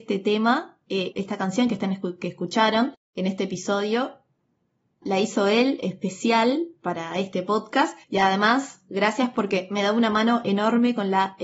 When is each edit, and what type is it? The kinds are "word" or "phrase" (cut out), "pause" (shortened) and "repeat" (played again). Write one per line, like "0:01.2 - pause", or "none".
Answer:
0:01.1 - word
0:03.0 - pause
0:05.0 - word
0:08.0 - pause